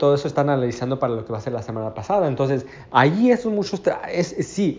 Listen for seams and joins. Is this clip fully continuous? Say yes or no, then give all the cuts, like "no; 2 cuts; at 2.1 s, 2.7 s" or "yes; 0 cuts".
yes; 0 cuts